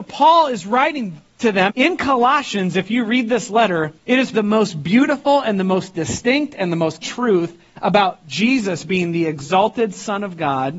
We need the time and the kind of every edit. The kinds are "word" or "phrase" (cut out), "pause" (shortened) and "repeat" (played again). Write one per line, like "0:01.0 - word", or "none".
0:01.7 - word
0:04.0 - pause
0:04.3 - word
0:07.0 - word